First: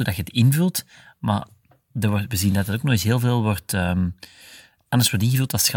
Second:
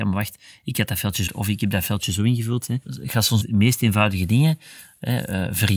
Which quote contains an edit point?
second; 3 cuts; at 1.3 s, 2.8 s, 3.4 s

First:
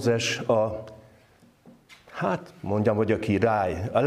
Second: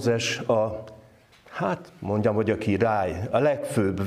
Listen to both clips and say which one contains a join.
second; 1 cut; at 1.3 s

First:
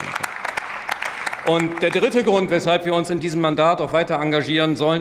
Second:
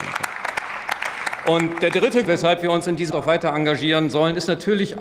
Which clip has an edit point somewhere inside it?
second; 2 cuts; at 2.2 s, 3.1 s

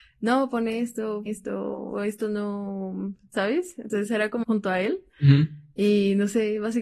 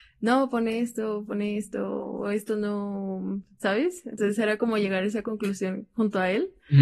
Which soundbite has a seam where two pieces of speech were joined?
first; 2 cuts; at 1.3 s, 4.4 s

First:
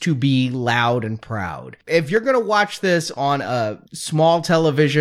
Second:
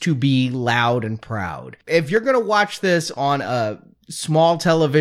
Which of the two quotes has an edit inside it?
first; 1 cut; at 3.9 s

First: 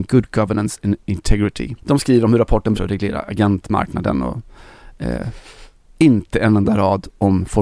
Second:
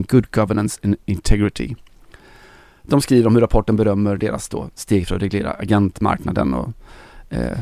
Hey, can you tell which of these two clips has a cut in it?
first; 2 cuts; at 1.8 s, 2.7 s

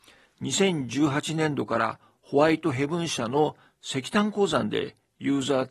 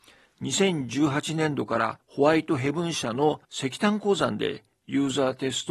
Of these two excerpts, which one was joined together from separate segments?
second; 2 cuts; at 2.0 s, 3.4 s

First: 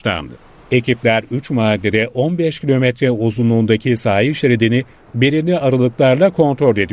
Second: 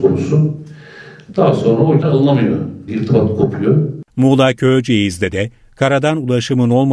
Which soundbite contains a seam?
second; 3 cuts; at 2.0 s, 2.9 s, 4.1 s

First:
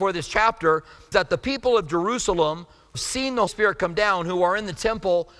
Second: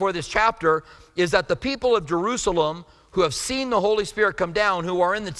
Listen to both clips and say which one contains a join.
first; 3 cuts; at 1.1 s, 2.9 s, 3.5 s

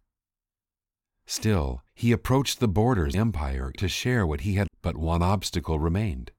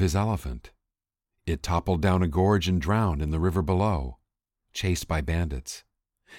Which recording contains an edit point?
first; 4 cuts; at 1.9 s, 3.1 s, 3.8 s, 4.7 s

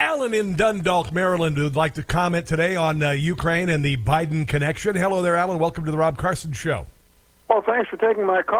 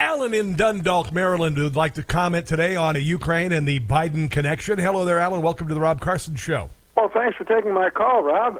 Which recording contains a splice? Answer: second; 2 cuts; at 2.9 s, 6.9 s

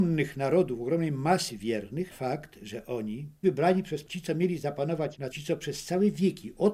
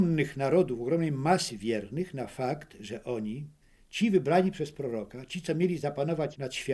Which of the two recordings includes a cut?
first; 4 cuts; at 2.1 s, 3.4 s, 4.1 s, 5.3 s

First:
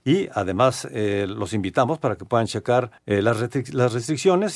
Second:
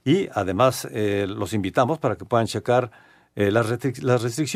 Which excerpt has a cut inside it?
first; 1 cut; at 3.0 s

